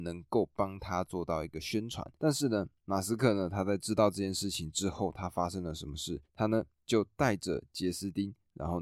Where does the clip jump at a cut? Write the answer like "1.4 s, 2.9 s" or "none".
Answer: 2.2 s, 6.2 s

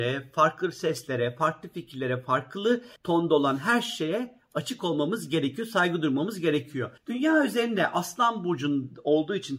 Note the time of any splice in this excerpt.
3.0 s, 7.0 s

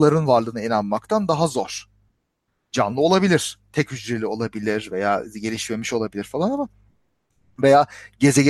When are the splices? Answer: none

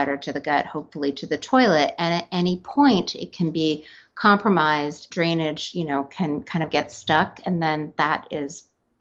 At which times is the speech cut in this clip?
none

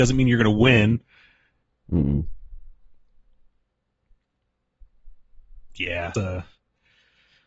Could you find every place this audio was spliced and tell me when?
6.1 s

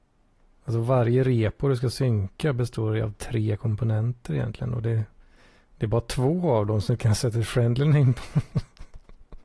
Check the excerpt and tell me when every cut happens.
none

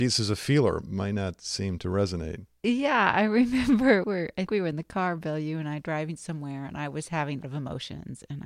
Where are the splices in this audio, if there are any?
4.0 s, 4.5 s, 7.4 s

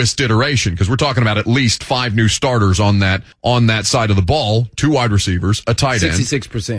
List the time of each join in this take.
3.3 s

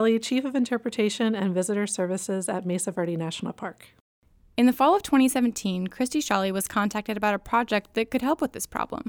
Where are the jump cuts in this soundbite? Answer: none

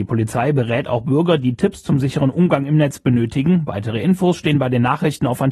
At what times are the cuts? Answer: none

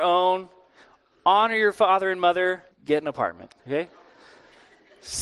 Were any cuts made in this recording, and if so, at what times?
2.7 s, 3.6 s

